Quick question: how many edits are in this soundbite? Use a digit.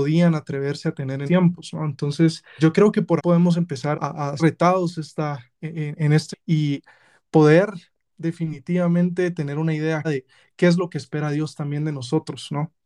9